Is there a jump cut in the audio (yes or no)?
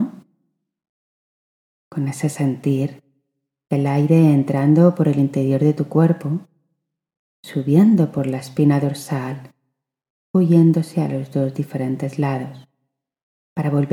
yes